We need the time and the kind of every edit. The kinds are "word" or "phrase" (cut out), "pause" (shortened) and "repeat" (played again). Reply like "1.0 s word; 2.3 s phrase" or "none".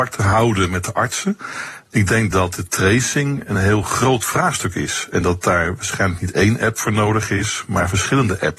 none